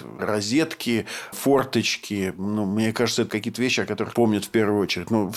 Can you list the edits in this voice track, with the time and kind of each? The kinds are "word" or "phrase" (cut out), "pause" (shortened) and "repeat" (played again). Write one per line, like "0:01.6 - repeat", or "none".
0:01.3 - word
0:03.3 - word
0:04.1 - word